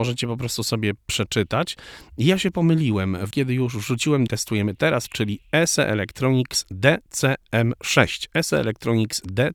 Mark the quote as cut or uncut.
cut